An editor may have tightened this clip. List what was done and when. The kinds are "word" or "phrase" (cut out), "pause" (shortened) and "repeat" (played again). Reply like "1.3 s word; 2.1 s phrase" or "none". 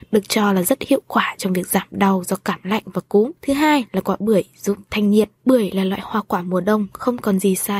3.4 s pause; 5.4 s pause